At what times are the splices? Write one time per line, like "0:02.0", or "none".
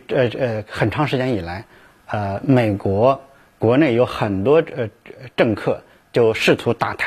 none